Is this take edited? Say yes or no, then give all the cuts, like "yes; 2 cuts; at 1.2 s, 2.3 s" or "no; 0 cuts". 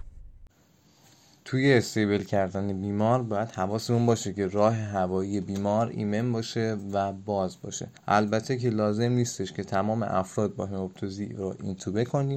yes; 1 cut; at 8.0 s